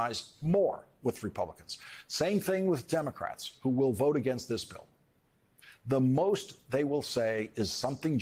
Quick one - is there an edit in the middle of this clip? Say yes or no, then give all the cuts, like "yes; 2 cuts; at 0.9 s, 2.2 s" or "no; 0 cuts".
no; 0 cuts